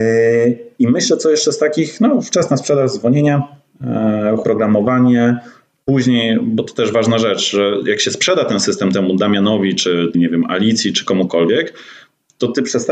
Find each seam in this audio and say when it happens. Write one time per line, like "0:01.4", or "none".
0:04.4
0:10.1